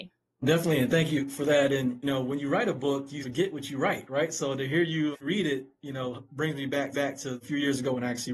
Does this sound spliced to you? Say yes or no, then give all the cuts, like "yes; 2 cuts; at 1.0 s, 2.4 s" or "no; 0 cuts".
yes; 4 cuts; at 2.0 s, 3.2 s, 5.1 s, 6.9 s